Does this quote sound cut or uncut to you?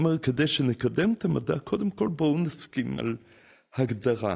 uncut